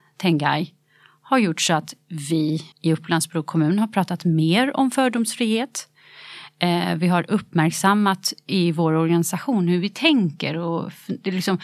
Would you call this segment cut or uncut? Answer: cut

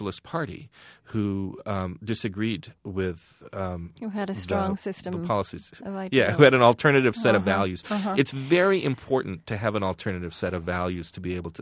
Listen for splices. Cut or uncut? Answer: cut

